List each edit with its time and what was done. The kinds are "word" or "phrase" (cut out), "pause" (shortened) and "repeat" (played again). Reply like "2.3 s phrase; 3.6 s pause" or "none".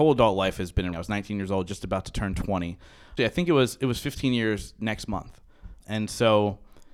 0.9 s word; 3.2 s phrase; 5.8 s word